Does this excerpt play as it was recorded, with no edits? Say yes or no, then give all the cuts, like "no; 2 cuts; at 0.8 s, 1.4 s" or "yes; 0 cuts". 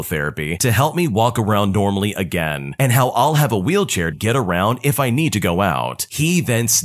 no; 1 cut; at 4.1 s